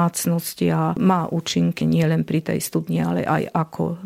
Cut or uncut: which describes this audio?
cut